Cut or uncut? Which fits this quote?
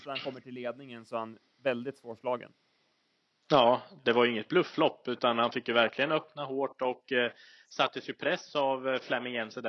uncut